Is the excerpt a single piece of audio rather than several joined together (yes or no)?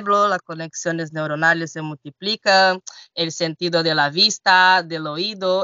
yes